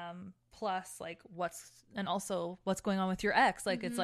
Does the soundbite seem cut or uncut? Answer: uncut